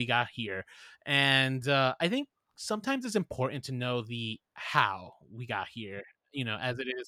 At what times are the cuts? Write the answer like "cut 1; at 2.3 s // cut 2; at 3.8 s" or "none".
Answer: none